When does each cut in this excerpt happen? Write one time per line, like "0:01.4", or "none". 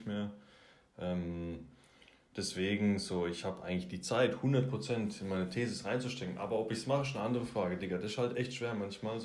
none